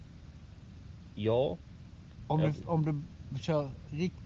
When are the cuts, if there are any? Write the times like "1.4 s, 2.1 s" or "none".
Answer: none